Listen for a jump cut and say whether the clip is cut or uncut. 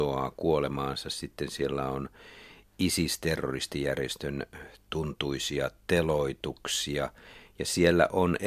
uncut